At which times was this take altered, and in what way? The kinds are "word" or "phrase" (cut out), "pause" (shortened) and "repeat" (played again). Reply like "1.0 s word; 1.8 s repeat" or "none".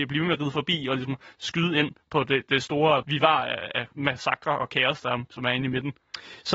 3.0 s phrase